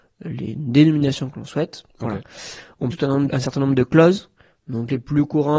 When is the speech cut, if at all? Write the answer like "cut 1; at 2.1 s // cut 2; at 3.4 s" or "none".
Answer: cut 1; at 1.9 s // cut 2; at 2.9 s // cut 3; at 3.3 s